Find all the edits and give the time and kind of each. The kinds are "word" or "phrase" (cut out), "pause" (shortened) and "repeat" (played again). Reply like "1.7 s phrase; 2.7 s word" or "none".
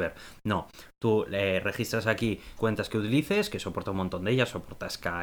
2.6 s word